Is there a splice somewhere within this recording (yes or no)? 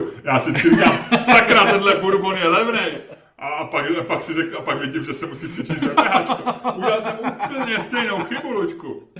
no